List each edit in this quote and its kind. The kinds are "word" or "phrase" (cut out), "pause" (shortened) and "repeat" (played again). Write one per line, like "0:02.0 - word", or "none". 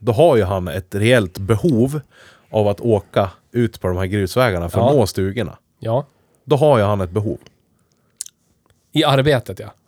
0:03.4 - pause